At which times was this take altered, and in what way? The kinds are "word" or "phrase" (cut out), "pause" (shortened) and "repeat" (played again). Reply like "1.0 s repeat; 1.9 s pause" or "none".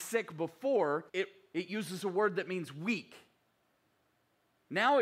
1.1 s pause

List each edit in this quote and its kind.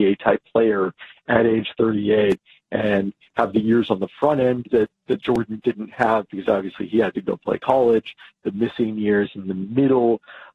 none

